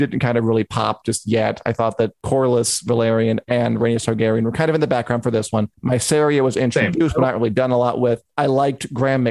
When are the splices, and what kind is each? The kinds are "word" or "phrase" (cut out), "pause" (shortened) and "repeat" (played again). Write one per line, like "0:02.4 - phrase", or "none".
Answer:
0:05.7 - pause